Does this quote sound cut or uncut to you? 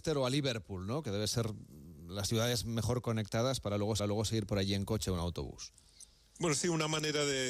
cut